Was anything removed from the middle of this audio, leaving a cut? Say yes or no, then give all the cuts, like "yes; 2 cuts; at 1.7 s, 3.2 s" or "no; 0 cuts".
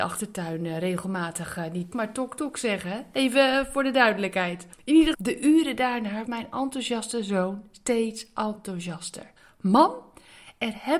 yes; 5 cuts; at 1.9 s, 4.7 s, 5.1 s, 6.2 s, 9.4 s